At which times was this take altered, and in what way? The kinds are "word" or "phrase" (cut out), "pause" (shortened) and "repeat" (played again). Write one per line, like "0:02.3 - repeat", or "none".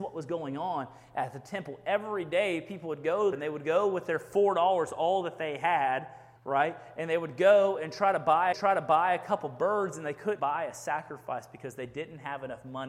0:03.3 - word
0:06.4 - pause
0:08.5 - repeat
0:10.4 - word